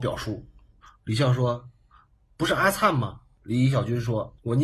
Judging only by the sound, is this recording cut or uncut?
uncut